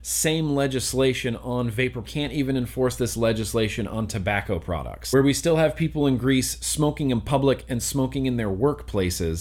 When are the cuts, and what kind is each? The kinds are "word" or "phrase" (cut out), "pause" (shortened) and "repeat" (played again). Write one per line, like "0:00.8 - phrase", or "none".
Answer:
0:02.0 - phrase

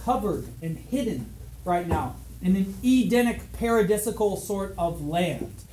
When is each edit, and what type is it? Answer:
none

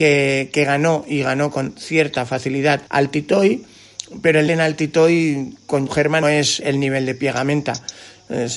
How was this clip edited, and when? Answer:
0:02.9 - pause
0:04.5 - word
0:05.9 - word
0:06.2 - word
0:06.6 - word

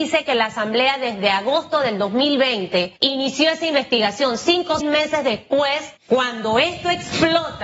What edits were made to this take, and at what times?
0:03.0 - pause
0:04.8 - word
0:06.0 - pause

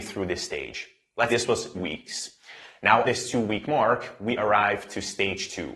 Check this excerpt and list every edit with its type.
0:01.3 - word
0:01.7 - word
0:03.0 - word

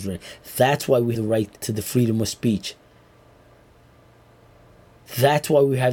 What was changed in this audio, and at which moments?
0:01.1 - word
0:01.6 - pause

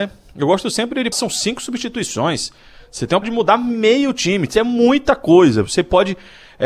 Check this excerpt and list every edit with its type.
0:01.1 - word
0:03.2 - word

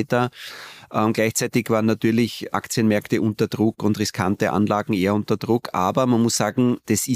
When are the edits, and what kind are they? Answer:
0:02.5 - word

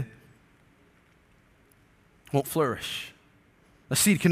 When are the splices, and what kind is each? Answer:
none

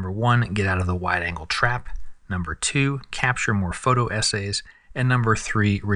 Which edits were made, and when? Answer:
none

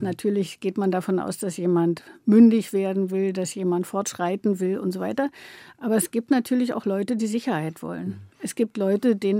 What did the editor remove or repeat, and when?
0:08.3 - pause

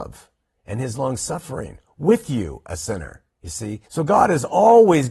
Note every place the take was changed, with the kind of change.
0:03.3 - pause
0:03.9 - pause

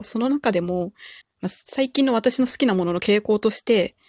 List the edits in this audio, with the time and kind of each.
0:01.2 - pause

